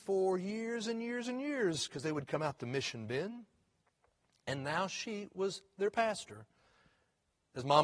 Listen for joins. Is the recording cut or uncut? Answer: uncut